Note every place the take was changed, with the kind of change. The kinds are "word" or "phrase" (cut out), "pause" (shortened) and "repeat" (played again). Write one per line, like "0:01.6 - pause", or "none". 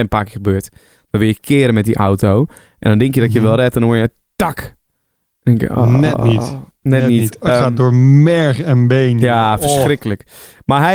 0:07.5 - word